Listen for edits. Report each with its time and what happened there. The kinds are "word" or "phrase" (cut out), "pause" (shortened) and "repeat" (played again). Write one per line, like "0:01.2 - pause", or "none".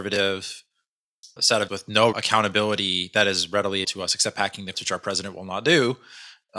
0:01.4 - word
0:01.7 - word
0:02.1 - word
0:03.8 - word
0:04.7 - word